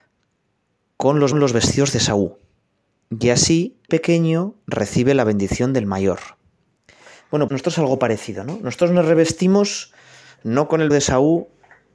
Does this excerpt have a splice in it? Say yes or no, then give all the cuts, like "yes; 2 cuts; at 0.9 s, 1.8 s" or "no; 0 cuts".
yes; 4 cuts; at 1.3 s, 3.9 s, 7.5 s, 10.9 s